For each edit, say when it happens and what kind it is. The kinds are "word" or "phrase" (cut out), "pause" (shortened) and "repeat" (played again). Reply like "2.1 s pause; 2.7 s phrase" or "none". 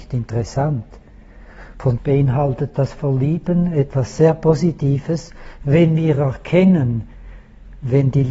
2.0 s word